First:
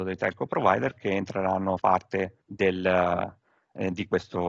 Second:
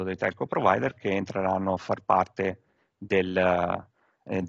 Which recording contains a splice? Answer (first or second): first